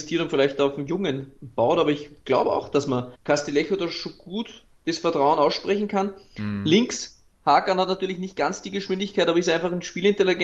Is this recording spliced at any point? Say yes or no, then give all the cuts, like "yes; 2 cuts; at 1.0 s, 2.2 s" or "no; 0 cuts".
yes; 1 cut; at 3.2 s